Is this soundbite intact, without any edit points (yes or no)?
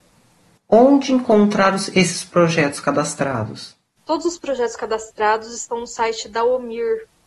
yes